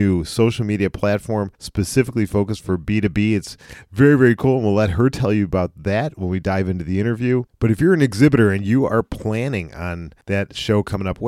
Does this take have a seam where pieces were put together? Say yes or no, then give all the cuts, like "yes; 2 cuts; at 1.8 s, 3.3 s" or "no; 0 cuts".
yes; 3 cuts; at 1.5 s, 7.5 s, 10.2 s